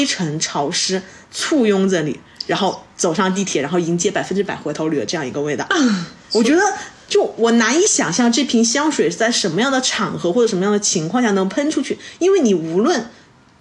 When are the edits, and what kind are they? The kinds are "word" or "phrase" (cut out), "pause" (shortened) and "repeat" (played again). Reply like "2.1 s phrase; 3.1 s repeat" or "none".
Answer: none